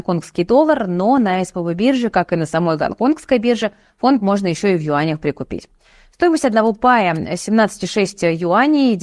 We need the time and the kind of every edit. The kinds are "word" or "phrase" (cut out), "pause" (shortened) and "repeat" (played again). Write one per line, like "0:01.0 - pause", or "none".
none